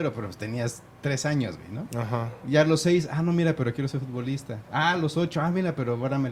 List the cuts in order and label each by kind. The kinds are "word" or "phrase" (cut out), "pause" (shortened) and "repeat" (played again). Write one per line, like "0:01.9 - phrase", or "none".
none